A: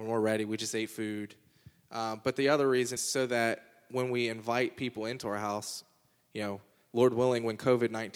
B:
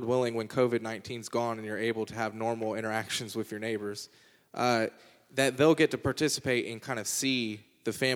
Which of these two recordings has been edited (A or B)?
A